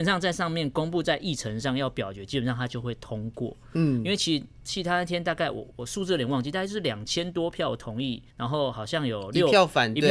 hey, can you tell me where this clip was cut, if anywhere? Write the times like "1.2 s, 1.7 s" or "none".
8.3 s